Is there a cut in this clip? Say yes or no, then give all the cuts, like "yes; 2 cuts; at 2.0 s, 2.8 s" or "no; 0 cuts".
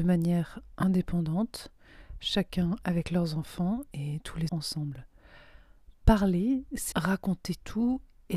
yes; 3 cuts; at 4.5 s, 6.0 s, 6.9 s